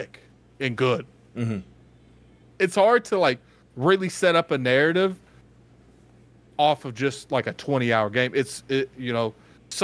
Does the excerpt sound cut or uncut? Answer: uncut